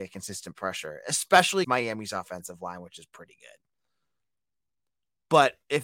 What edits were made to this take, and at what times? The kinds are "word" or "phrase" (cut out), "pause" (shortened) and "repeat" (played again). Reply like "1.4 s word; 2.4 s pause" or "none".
1.6 s word